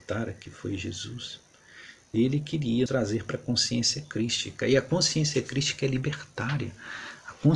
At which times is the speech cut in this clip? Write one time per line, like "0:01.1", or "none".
0:02.9